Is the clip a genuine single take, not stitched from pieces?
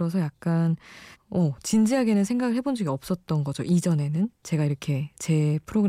no; 1 cut; at 1.1 s

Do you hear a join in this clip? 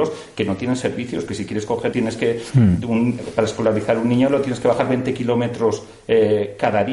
yes; 1 cut; at 1.9 s

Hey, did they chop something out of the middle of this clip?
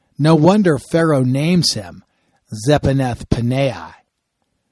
no; 0 cuts

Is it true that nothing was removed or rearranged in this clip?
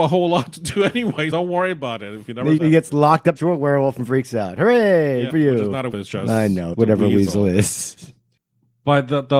no; 6 cuts; at 1.3 s, 2.6 s, 3.4 s, 5.3 s, 5.9 s, 6.7 s

